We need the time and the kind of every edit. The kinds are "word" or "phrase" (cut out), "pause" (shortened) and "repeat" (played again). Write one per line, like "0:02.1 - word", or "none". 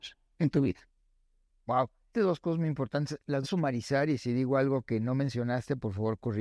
0:02.1 - word
0:03.4 - word